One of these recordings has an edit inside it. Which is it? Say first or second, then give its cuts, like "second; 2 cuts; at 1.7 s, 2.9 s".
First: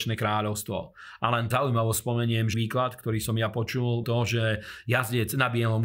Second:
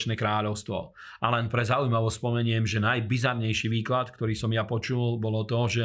first; 3 cuts; at 1.5 s, 2.5 s, 4.0 s